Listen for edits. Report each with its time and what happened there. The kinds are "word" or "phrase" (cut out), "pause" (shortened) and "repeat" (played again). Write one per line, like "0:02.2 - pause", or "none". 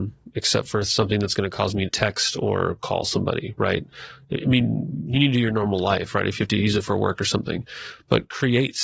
0:01.9 - word